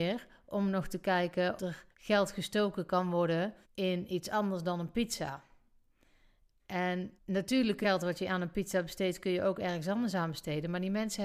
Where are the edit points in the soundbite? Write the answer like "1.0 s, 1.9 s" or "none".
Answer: 1.6 s, 1.9 s, 3.6 s, 7.2 s, 7.8 s